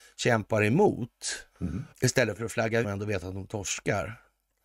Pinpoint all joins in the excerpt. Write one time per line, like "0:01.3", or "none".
0:01.5
0:01.9
0:02.8